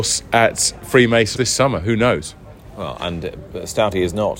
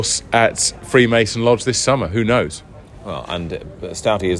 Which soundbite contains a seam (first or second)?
first